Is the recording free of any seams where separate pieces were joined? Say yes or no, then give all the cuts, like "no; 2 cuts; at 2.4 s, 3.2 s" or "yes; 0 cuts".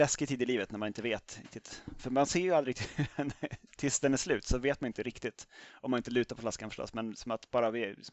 yes; 0 cuts